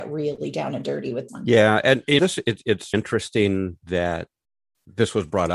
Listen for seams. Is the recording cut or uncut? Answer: cut